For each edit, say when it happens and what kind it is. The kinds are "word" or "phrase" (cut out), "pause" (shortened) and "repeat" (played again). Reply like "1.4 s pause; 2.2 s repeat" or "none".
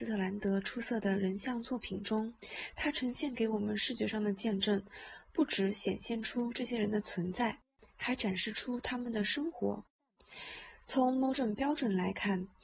none